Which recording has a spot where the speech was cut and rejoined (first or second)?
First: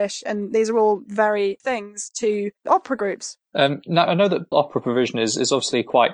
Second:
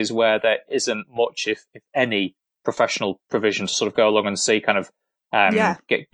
first